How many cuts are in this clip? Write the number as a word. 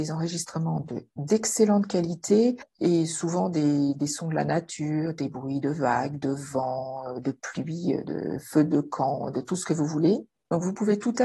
zero